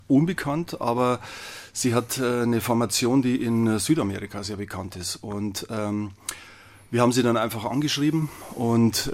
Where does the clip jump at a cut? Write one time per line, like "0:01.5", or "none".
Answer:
none